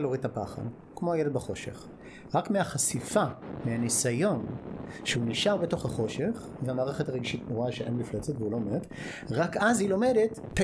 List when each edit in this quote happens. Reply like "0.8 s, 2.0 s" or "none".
none